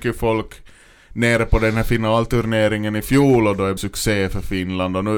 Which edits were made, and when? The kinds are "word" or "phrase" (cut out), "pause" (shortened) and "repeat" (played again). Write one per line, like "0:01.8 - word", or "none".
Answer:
0:03.8 - word